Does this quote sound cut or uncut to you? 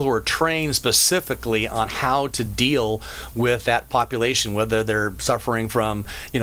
uncut